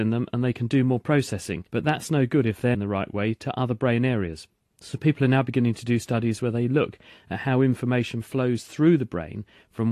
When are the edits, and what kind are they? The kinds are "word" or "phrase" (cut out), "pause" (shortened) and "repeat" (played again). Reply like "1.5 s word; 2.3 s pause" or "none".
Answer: 1.7 s pause; 2.7 s phrase